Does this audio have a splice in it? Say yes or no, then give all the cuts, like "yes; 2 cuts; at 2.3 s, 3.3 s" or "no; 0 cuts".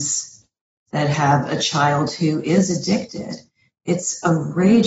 no; 0 cuts